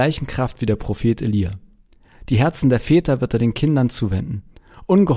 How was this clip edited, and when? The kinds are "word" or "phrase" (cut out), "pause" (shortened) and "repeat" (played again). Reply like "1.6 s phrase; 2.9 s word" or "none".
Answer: none